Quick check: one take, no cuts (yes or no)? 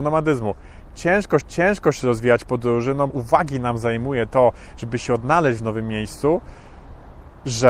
no